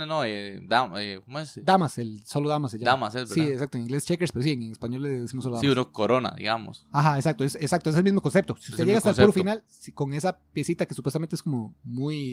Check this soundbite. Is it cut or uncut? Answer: uncut